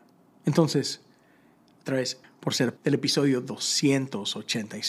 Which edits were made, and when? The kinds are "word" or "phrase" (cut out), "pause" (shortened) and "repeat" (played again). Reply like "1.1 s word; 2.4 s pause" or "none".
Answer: 2.2 s word; 2.8 s word